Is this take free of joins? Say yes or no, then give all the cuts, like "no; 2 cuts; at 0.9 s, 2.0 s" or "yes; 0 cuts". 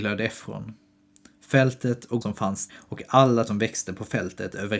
no; 3 cuts; at 2.2 s, 2.7 s, 3.5 s